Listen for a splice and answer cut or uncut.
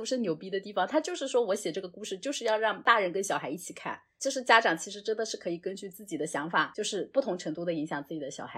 uncut